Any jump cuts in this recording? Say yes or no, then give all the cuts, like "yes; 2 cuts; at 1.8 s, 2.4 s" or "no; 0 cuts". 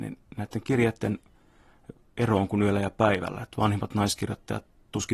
no; 0 cuts